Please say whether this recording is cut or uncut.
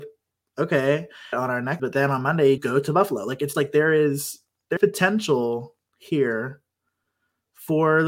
cut